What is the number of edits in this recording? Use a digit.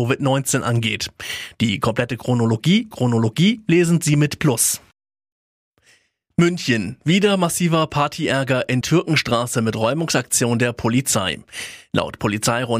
3